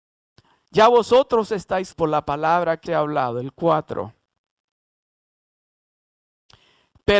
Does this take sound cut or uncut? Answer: cut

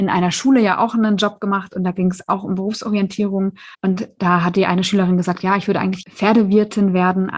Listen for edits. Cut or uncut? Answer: cut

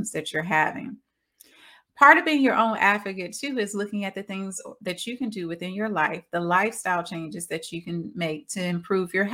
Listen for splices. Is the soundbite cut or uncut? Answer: uncut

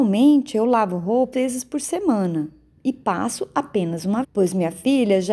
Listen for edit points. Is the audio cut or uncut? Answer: cut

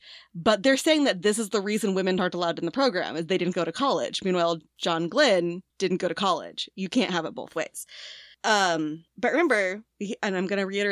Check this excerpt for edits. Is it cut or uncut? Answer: uncut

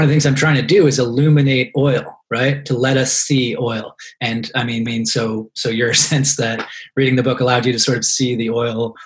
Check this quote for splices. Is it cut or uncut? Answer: cut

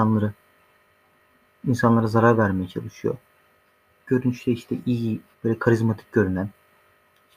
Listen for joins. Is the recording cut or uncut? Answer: cut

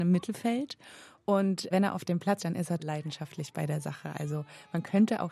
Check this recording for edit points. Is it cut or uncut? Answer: cut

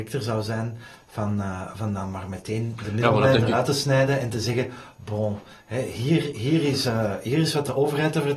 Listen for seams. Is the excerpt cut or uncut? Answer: uncut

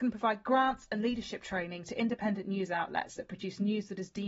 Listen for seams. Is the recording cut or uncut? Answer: uncut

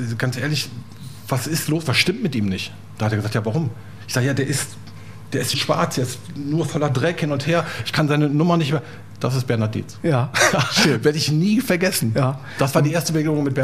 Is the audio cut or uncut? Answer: cut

